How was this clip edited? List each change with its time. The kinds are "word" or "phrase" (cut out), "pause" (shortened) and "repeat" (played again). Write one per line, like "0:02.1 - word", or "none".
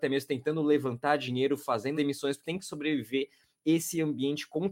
0:01.9 - word
0:02.4 - word